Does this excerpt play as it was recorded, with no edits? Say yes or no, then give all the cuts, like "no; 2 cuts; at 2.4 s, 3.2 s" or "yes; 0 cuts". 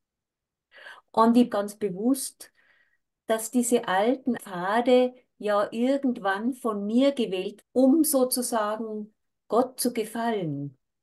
no; 3 cuts; at 1.5 s, 4.4 s, 7.6 s